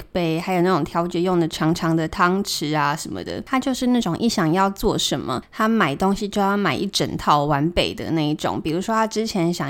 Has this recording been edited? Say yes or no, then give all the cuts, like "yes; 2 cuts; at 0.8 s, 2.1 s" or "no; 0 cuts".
no; 0 cuts